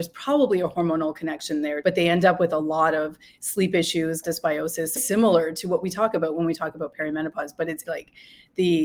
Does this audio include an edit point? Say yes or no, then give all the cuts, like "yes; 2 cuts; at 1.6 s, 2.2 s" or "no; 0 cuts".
yes; 4 cuts; at 1.8 s, 4.2 s, 5.0 s, 7.8 s